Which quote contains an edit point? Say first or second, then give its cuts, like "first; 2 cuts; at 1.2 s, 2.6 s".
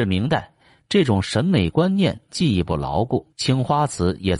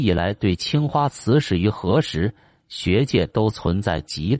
first; 1 cut; at 3.3 s